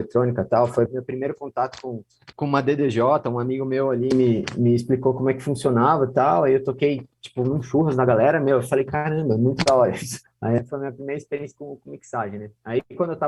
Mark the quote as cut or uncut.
cut